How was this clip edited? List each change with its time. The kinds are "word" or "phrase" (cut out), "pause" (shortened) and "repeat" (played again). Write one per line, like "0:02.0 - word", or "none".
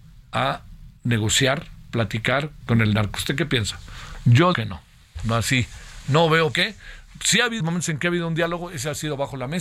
0:01.0 - pause
0:02.6 - word
0:04.5 - word
0:06.5 - word
0:07.6 - word